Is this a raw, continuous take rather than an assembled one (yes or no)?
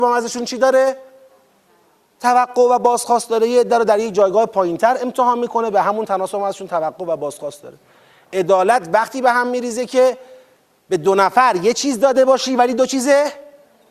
yes